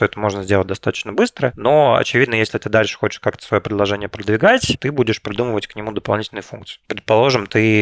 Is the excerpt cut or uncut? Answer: cut